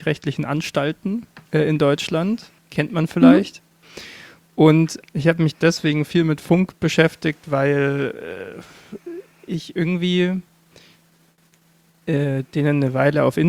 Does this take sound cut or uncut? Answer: cut